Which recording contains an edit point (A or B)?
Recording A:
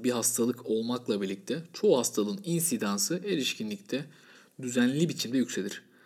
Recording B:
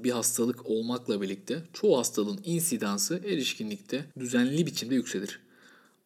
B